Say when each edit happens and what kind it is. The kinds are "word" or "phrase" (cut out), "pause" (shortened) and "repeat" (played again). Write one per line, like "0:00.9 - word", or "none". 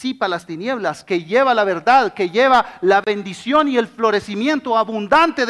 none